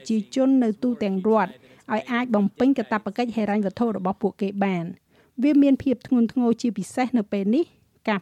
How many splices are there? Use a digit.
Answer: 0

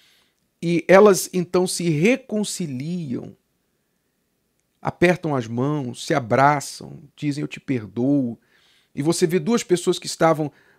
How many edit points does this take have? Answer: 0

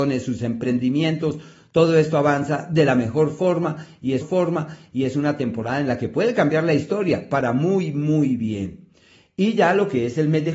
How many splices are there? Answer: 1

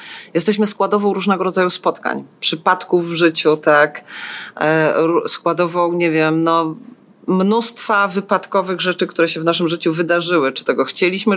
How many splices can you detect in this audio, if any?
0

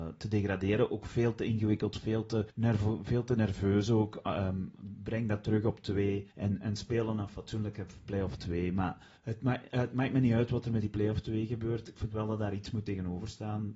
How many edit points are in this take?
3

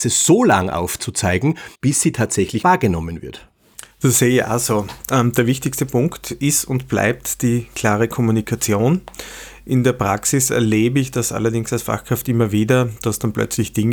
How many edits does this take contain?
3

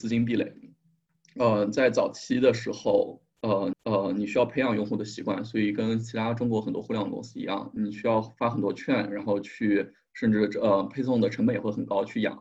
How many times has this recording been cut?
2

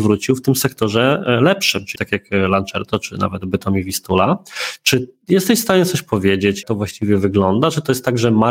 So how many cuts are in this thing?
2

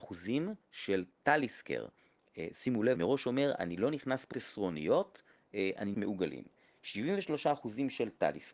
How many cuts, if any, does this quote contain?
3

